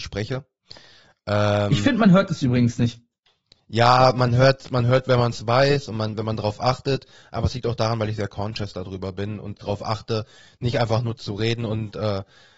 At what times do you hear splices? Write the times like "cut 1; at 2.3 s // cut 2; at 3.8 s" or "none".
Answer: cut 1; at 9.6 s // cut 2; at 11.2 s